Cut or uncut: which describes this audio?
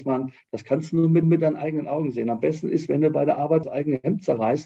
cut